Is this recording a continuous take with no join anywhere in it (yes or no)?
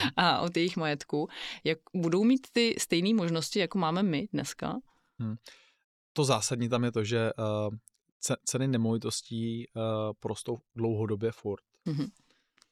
yes